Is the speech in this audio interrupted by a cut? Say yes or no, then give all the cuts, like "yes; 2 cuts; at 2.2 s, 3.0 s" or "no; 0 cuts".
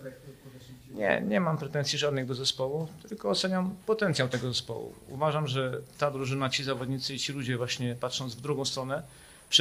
no; 0 cuts